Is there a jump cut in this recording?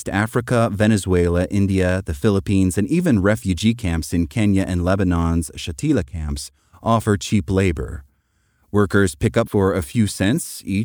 yes; 1 cut; at 9.5 s

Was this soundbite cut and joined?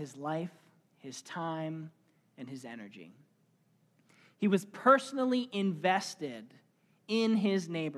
no; 0 cuts

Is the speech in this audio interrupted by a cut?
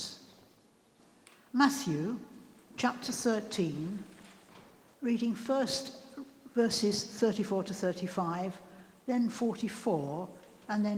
no; 0 cuts

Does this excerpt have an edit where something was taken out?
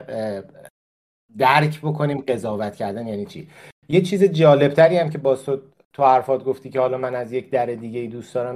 no; 0 cuts

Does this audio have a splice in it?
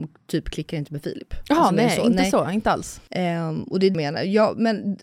yes; 1 cut; at 3.9 s

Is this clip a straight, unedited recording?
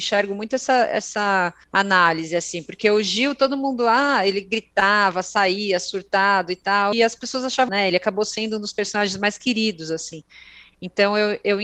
no; 3 cuts; at 1.6 s, 6.9 s, 7.7 s

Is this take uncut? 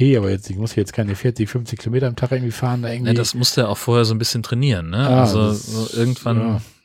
yes; 0 cuts

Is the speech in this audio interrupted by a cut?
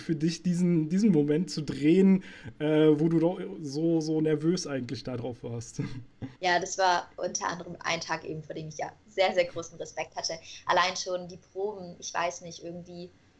yes; 2 cuts; at 6.3 s, 7.1 s

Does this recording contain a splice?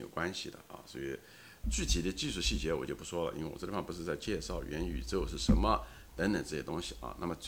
yes; 1 cut; at 1.6 s

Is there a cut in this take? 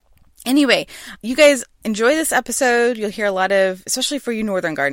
yes; 1 cut; at 1.2 s

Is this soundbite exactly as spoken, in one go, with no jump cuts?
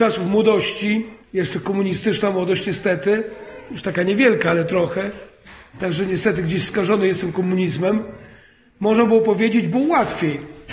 no; 1 cut; at 1.2 s

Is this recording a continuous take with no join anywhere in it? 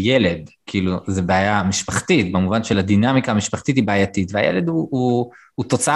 yes; 0 cuts

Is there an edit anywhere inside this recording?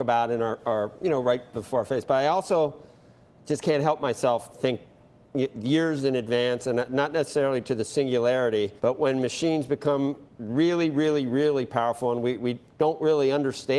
yes; 1 cut; at 8.8 s

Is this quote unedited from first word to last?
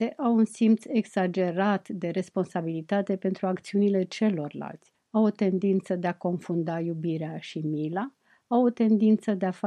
yes; 0 cuts

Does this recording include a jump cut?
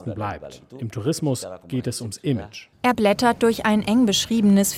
no; 0 cuts

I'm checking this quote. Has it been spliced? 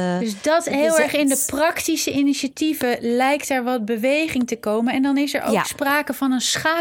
no; 0 cuts

